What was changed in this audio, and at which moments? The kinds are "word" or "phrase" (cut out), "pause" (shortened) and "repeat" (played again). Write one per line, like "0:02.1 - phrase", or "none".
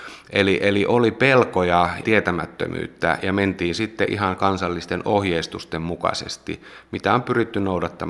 0:02.0 - phrase